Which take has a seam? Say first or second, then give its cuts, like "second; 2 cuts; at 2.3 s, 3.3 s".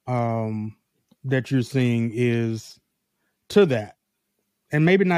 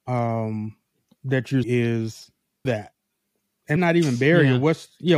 second; 3 cuts; at 1.6 s, 2.7 s, 3.8 s